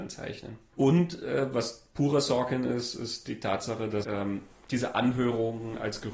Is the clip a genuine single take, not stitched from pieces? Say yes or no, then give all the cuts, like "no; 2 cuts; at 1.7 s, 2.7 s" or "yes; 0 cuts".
no; 1 cut; at 4.0 s